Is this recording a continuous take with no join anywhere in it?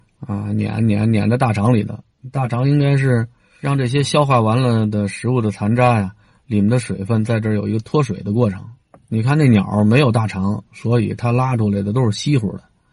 yes; 0 cuts

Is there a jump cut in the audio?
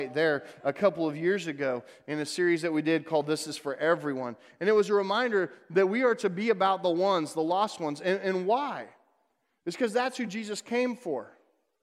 no; 0 cuts

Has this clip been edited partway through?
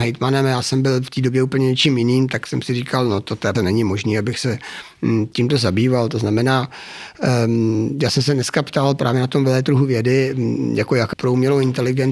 yes; 2 cuts; at 3.5 s, 11.1 s

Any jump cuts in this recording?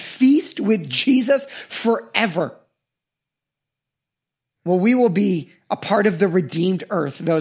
no; 0 cuts

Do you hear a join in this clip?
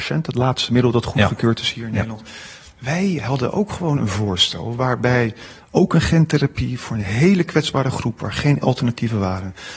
no; 0 cuts

